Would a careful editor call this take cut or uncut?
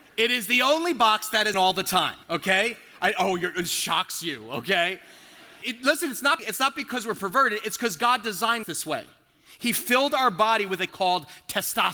cut